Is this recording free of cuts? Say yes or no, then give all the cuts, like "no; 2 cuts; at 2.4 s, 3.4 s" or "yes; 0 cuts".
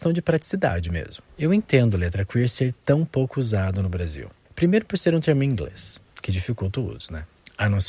yes; 0 cuts